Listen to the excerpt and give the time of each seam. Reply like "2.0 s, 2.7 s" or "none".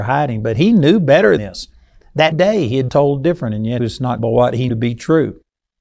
1.4 s, 2.3 s, 2.9 s, 3.8 s, 4.2 s, 4.7 s